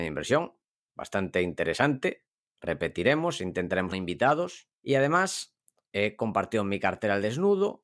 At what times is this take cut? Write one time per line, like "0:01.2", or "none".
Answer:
0:03.9
0:04.7

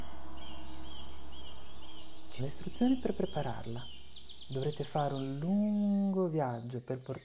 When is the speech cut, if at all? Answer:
0:02.4

